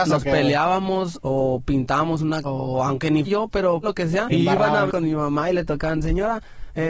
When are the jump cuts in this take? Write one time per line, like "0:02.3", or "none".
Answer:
0:01.2
0:02.4
0:03.2
0:03.8
0:04.3
0:04.9